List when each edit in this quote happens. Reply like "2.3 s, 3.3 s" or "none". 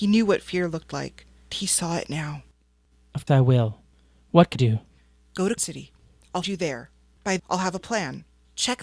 1.5 s, 3.3 s, 4.6 s, 5.6 s, 6.4 s, 7.4 s